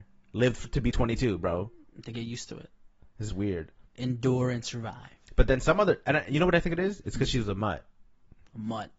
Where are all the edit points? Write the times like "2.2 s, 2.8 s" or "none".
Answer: 0.9 s, 3.3 s